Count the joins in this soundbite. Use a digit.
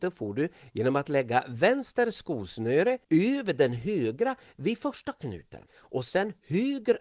2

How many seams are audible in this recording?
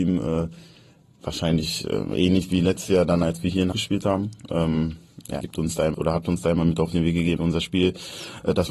4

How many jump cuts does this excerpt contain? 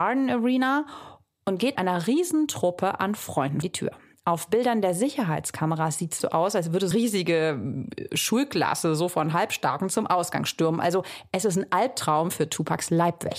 4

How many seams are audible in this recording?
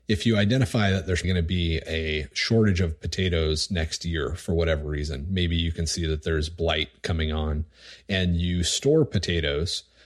1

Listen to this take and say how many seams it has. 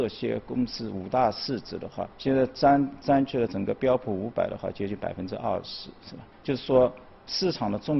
2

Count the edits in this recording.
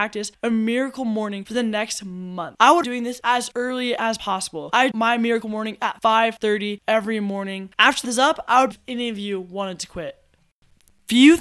4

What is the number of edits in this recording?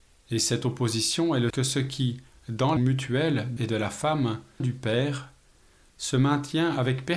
4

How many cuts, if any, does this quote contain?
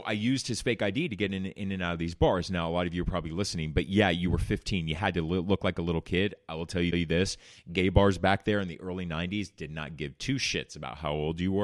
0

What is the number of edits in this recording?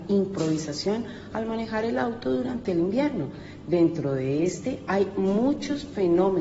0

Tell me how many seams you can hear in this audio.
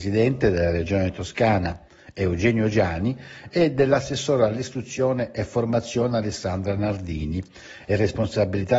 0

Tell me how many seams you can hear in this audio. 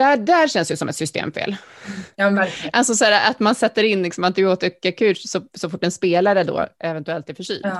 1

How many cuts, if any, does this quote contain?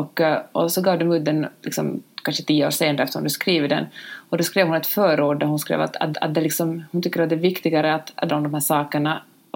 2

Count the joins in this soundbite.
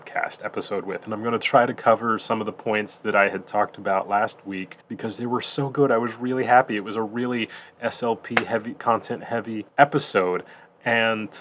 2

